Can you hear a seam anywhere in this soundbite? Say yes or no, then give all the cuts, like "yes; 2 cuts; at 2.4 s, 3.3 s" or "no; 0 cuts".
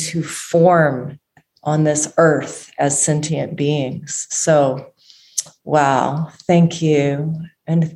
no; 0 cuts